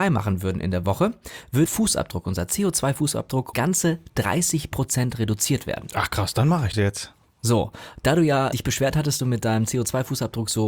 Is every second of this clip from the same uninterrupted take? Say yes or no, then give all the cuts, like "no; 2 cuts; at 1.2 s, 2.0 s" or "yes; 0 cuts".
no; 5 cuts; at 1.7 s, 3.5 s, 6.7 s, 8.5 s, 9.2 s